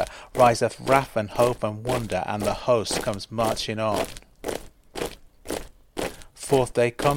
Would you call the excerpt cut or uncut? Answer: uncut